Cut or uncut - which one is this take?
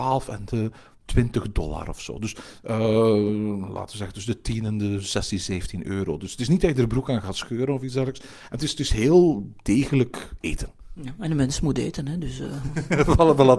uncut